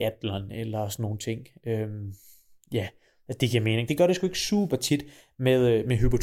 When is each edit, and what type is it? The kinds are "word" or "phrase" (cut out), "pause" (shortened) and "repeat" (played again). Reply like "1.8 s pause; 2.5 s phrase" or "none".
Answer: none